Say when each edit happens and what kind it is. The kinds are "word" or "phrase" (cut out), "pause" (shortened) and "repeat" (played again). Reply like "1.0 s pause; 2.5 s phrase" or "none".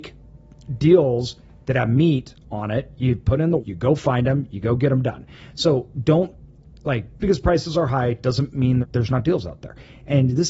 3.6 s word; 7.2 s word; 8.8 s word